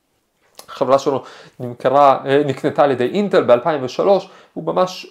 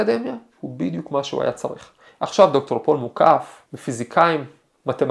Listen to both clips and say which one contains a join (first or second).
second